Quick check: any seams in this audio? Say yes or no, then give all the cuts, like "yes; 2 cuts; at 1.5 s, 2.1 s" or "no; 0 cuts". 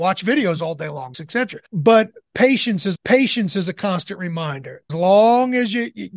yes; 4 cuts; at 1.1 s, 1.7 s, 2.9 s, 4.9 s